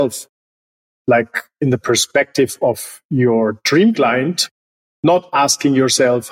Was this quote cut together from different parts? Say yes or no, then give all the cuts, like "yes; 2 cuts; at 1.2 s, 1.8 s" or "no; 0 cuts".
no; 0 cuts